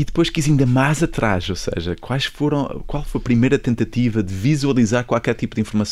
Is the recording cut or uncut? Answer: uncut